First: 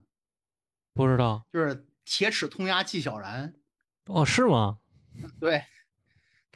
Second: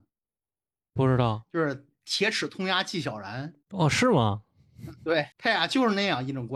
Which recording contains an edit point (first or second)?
second